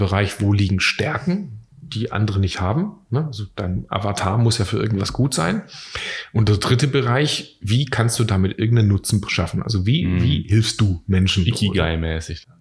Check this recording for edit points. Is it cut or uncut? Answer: uncut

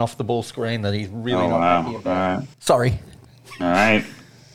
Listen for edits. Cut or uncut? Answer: cut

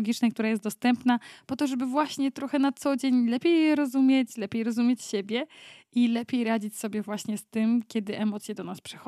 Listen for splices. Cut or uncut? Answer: uncut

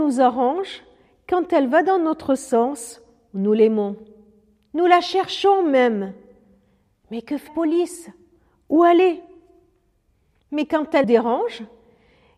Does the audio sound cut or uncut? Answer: cut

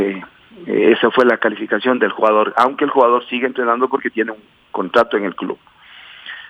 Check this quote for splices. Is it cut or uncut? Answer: uncut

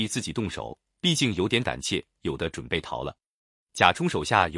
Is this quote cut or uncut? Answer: uncut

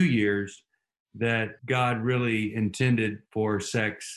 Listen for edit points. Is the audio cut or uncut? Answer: cut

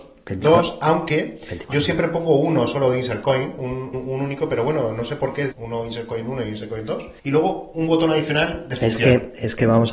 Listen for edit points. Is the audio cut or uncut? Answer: cut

